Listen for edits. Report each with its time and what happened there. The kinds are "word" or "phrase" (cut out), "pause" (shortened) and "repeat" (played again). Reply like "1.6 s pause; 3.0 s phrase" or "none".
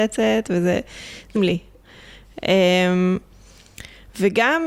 1.4 s word